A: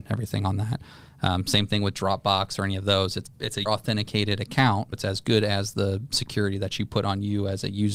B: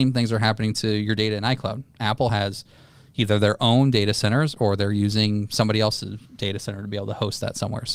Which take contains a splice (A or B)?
A